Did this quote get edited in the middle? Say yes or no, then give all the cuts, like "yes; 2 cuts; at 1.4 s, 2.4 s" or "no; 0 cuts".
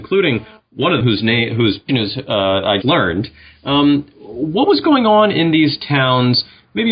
yes; 3 cuts; at 1.0 s, 1.9 s, 2.8 s